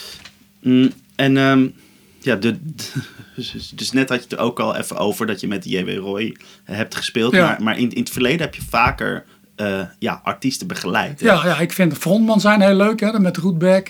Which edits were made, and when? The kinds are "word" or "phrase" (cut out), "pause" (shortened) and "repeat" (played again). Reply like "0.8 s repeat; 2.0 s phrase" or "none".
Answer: none